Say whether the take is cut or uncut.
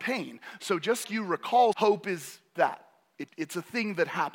cut